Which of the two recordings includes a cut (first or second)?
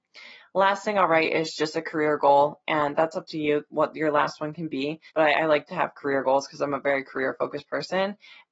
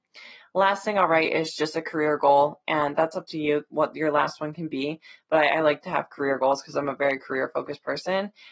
first